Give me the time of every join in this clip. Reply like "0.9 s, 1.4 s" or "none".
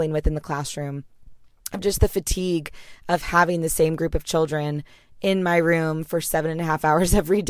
none